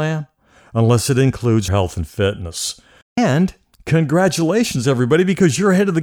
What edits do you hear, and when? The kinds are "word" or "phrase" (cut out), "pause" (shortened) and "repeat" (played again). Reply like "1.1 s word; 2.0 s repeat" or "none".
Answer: 1.7 s phrase; 3.0 s pause